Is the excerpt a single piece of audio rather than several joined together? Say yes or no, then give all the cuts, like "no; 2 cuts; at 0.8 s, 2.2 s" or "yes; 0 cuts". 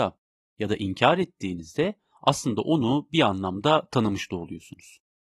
yes; 0 cuts